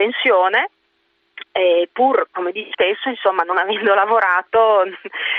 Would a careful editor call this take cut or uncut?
cut